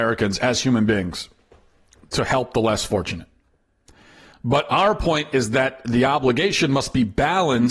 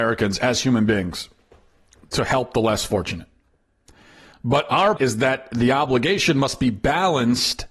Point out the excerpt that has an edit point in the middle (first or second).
second